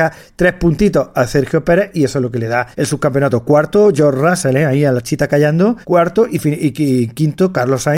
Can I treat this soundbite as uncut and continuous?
no; 2 cuts; at 2.7 s, 5.8 s

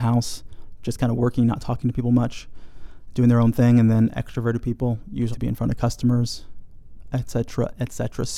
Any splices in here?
yes; 1 cut; at 5.3 s

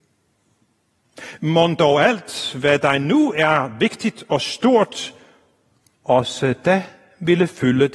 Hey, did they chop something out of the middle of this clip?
no; 0 cuts

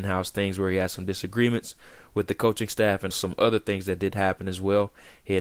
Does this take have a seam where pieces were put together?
yes; 1 cut; at 3.1 s

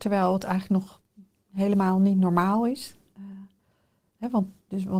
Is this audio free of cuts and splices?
yes; 0 cuts

